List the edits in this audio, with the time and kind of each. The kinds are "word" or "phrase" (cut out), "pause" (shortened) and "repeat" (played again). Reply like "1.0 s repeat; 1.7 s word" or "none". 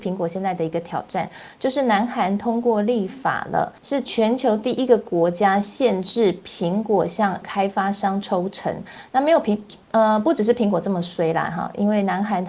3.8 s pause; 7.4 s word